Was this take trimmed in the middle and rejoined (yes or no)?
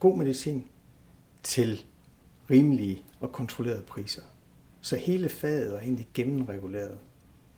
no